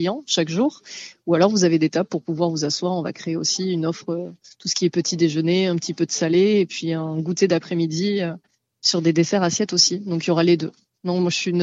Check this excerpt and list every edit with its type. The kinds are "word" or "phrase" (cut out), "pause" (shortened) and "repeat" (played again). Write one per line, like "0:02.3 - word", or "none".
none